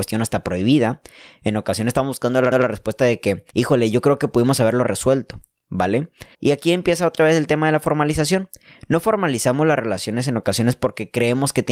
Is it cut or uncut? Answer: cut